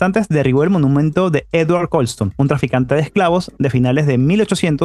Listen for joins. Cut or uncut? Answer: uncut